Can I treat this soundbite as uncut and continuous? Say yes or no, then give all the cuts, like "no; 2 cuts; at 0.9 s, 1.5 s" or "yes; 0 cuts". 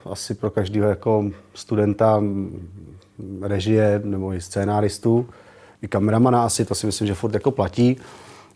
yes; 0 cuts